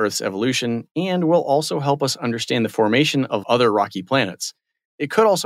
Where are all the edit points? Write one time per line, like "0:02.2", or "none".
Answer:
0:03.4